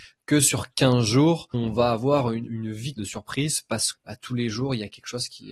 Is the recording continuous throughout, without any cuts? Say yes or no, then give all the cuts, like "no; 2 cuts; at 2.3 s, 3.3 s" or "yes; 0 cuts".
no; 4 cuts; at 1.5 s, 2.5 s, 3.0 s, 3.9 s